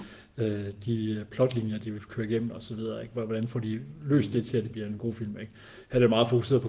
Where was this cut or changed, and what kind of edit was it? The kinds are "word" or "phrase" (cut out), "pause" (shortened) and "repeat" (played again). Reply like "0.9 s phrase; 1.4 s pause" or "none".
4.7 s word